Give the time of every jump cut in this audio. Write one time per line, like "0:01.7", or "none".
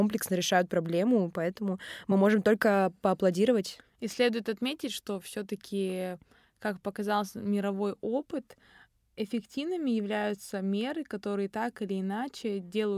none